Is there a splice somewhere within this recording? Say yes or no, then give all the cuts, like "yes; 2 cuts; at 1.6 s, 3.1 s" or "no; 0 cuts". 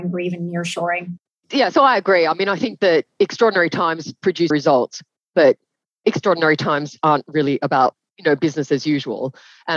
yes; 1 cut; at 4.5 s